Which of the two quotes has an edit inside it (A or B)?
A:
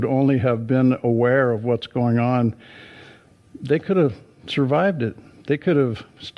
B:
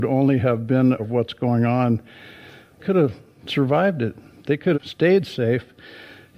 B